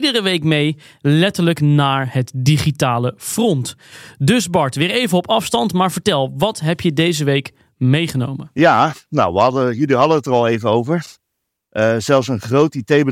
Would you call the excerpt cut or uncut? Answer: uncut